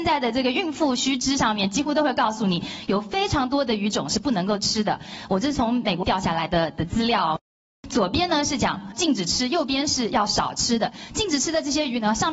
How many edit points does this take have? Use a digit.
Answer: 1